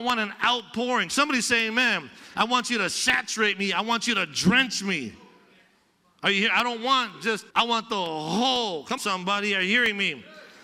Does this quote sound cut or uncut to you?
cut